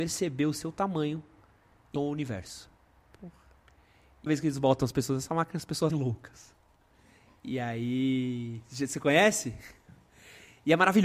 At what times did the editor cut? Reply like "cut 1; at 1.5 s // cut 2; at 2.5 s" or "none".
cut 1; at 2.0 s // cut 2; at 4.3 s // cut 3; at 5.9 s